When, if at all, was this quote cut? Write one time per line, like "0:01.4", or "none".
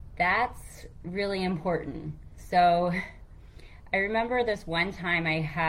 none